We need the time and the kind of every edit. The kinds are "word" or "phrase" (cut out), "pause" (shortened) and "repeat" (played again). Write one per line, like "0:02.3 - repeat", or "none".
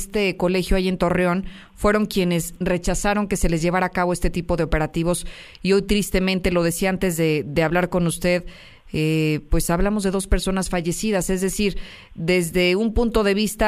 none